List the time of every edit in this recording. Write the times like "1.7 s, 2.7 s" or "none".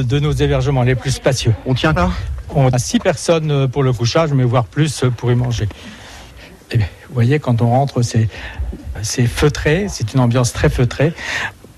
2.0 s, 2.7 s, 6.8 s, 9.0 s